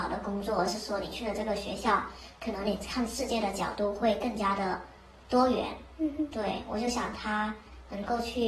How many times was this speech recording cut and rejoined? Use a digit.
0